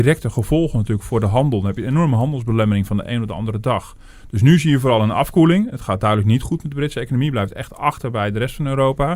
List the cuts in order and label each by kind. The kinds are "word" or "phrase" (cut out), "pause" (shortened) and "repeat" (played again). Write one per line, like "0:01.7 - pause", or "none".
none